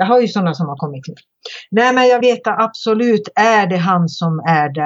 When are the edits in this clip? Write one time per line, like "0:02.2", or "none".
0:02.2